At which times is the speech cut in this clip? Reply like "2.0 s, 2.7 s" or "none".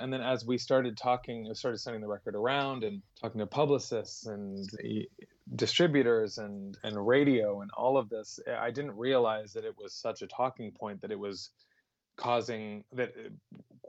3.1 s, 4.8 s, 6.8 s